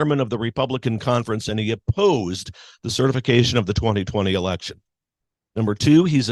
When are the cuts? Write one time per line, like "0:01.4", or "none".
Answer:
none

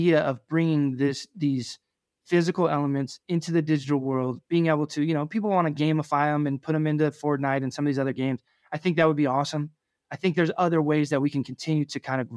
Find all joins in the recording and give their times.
none

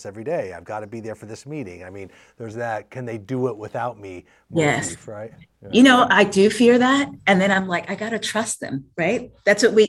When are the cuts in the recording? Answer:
0:02.5

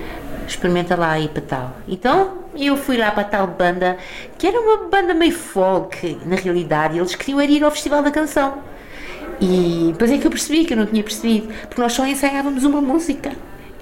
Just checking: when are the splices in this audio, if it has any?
none

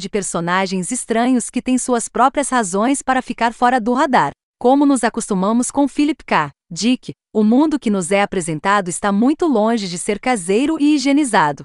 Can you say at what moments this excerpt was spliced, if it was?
0:06.6

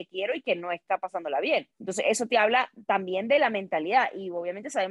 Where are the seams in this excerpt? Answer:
0:01.7

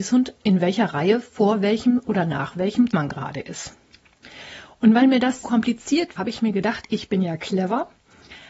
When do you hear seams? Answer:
0:02.9
0:05.4
0:06.2

